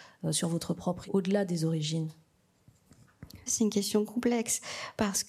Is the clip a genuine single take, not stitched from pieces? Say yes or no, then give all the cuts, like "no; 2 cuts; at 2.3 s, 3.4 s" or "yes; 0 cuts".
no; 2 cuts; at 1.0 s, 3.5 s